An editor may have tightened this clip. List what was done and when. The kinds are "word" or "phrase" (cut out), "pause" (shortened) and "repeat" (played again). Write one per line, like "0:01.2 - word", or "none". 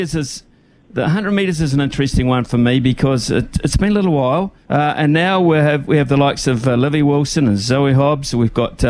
0:04.6 - pause